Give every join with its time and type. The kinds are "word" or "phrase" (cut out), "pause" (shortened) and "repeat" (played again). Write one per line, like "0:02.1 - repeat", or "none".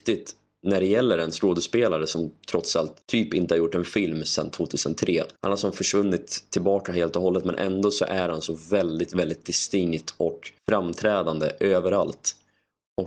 0:03.0 - pause
0:05.4 - pause
0:10.6 - pause

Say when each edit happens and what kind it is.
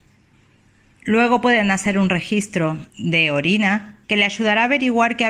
0:02.9 - pause
0:04.0 - pause

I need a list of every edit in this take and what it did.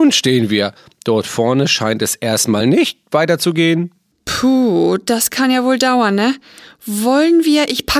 none

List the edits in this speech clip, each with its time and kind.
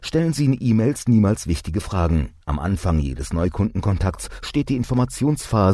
0:02.4 - pause

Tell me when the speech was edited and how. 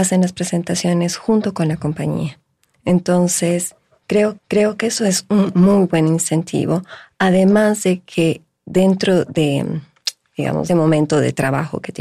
0:04.4 - repeat
0:10.7 - phrase

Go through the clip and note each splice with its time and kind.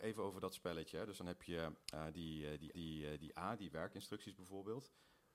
0:01.8 - pause
0:02.7 - repeat

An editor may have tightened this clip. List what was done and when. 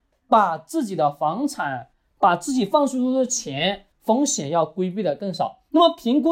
0:03.9 - pause

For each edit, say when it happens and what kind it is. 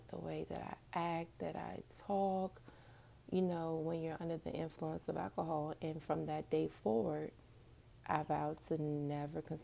none

